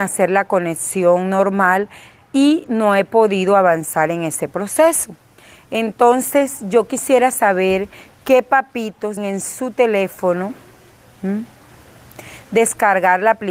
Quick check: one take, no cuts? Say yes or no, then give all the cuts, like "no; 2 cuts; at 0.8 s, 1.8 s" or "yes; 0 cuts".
no; 1 cut; at 9.2 s